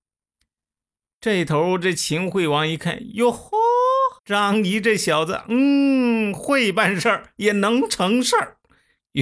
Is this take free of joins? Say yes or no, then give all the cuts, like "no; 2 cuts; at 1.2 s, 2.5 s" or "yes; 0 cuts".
no; 1 cut; at 4.2 s